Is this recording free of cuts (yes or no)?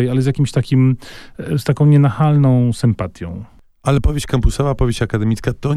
yes